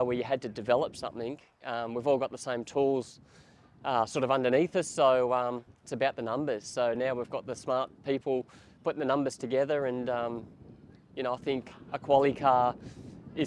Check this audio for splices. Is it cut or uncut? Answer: uncut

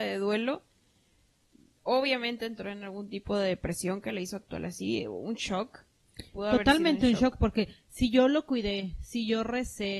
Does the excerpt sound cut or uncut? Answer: uncut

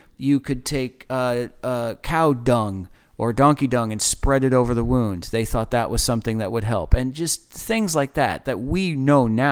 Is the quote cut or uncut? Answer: uncut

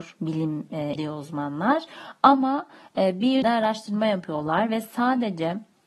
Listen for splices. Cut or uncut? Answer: cut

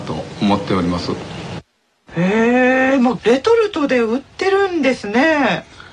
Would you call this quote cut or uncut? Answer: uncut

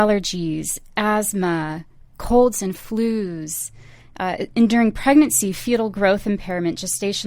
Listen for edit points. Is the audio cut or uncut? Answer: uncut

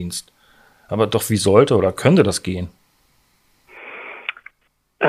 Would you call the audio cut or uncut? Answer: uncut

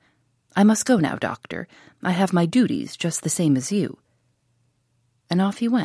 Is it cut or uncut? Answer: uncut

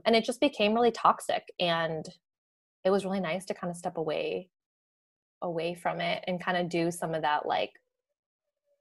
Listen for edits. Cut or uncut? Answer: uncut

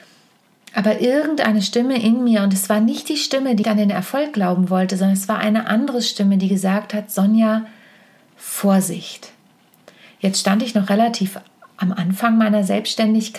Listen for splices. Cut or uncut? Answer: cut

